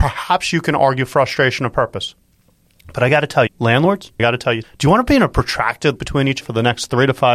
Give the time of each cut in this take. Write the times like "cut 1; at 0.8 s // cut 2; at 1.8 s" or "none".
cut 1; at 3.5 s // cut 2; at 4.2 s // cut 3; at 4.6 s // cut 4; at 6.0 s // cut 5; at 6.4 s